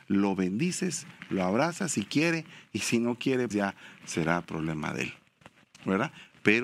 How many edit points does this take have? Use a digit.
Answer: 1